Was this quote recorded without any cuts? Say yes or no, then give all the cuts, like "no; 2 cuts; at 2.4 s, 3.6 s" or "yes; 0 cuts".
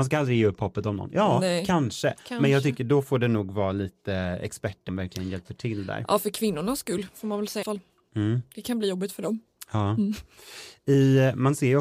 no; 2 cuts; at 4.9 s, 7.6 s